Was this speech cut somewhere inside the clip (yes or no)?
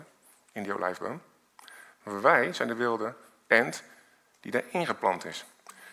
no